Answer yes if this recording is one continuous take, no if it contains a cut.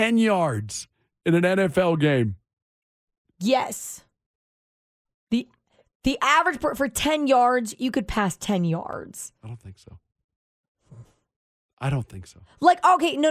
yes